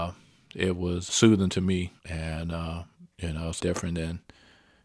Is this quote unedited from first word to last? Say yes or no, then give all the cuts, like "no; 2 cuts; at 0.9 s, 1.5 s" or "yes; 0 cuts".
no; 4 cuts; at 1.1 s, 2.0 s, 3.1 s, 3.6 s